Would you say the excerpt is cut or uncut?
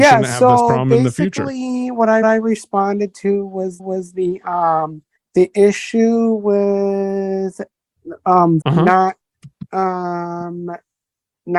cut